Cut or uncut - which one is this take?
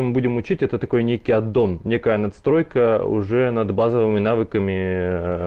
uncut